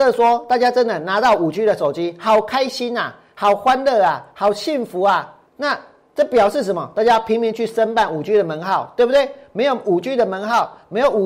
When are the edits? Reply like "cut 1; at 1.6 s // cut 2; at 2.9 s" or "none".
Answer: cut 1; at 5.5 s